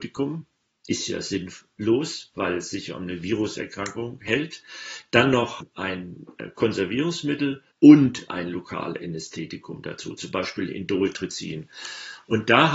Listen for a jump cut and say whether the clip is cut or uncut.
cut